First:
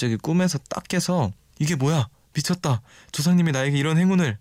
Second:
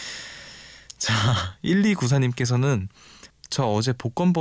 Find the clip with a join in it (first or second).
second